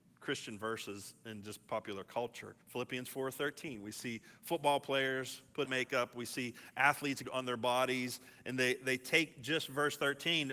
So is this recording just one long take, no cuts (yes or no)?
no